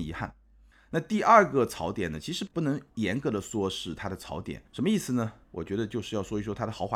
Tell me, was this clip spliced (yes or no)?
yes